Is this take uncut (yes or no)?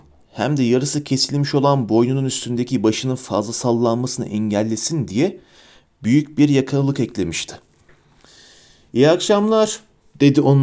yes